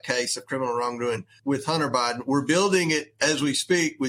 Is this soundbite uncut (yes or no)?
no